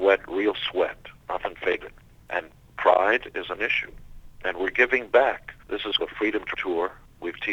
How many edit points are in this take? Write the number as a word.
five